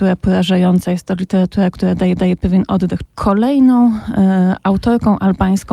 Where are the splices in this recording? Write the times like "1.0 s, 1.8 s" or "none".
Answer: 2.2 s, 3.0 s